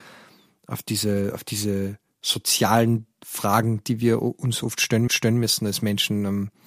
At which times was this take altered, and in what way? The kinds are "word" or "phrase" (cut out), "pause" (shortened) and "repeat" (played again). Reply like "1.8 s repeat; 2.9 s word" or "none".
5.1 s repeat